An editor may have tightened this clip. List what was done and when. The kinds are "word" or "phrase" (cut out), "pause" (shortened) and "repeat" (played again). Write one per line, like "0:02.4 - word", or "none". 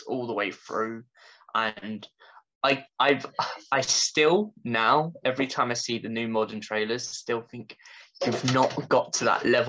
none